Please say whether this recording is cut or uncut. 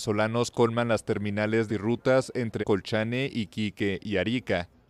cut